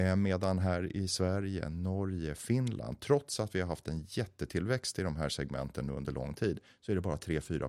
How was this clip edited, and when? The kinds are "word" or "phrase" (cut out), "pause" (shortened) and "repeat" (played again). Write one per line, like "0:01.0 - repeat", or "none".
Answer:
none